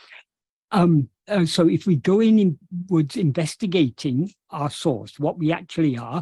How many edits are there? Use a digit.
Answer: 1